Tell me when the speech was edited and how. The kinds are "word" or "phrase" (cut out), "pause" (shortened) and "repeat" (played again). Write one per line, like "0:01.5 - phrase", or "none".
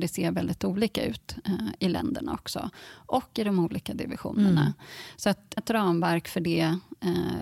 0:05.6 - phrase